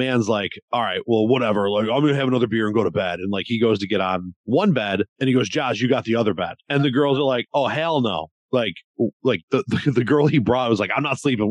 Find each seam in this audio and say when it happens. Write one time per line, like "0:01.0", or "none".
none